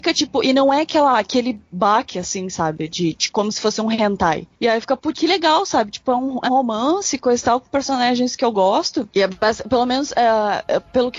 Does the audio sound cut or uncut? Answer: cut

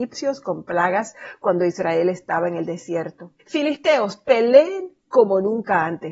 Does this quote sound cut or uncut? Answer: cut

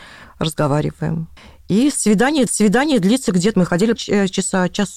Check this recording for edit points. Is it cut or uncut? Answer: cut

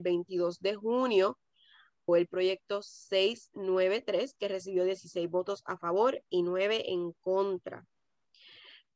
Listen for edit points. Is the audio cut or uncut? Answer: cut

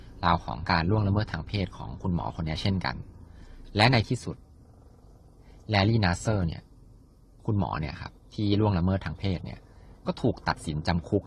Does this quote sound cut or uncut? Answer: uncut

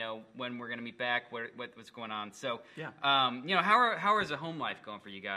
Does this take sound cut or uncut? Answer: uncut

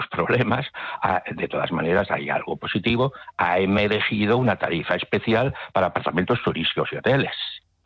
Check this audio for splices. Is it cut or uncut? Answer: uncut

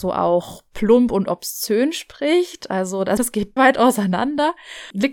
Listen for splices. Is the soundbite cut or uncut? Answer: cut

